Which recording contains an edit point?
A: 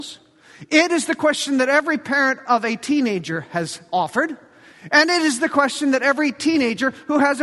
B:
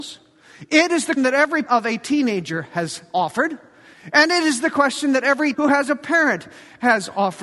B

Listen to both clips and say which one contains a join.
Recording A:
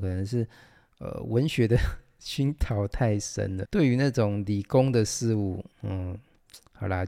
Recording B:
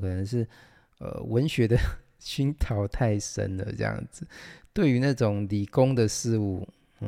A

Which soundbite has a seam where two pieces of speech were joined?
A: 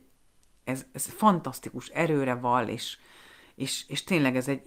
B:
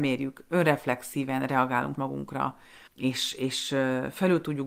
B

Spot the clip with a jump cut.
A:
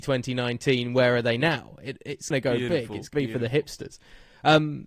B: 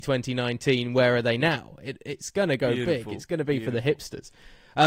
A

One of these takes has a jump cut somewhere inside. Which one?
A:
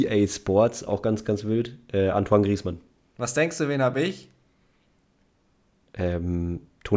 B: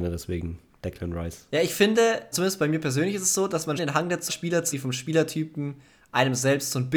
B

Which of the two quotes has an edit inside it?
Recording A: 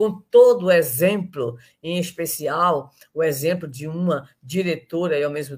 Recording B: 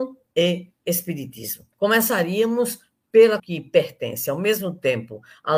B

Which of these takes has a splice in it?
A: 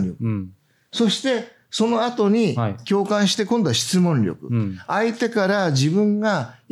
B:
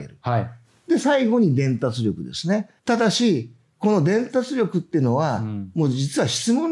B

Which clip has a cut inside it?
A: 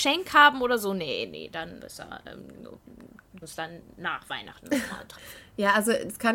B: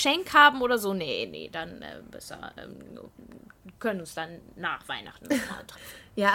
A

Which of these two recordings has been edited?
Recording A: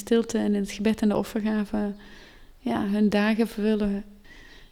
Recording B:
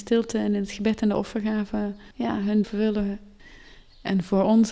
B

